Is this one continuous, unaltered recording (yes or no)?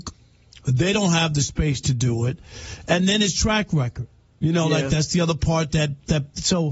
yes